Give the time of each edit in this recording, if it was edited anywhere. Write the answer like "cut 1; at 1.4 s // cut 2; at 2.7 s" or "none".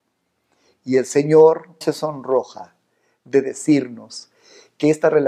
cut 1; at 1.8 s